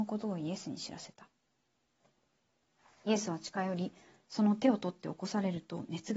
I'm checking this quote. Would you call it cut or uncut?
uncut